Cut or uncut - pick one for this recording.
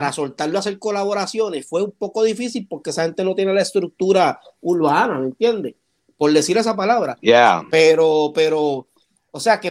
uncut